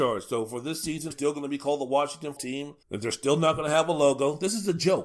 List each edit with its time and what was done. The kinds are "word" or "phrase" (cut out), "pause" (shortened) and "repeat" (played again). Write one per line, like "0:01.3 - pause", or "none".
0:01.1 - phrase
0:02.4 - word
0:02.8 - pause